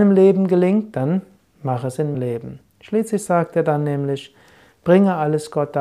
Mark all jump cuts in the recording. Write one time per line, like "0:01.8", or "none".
0:02.1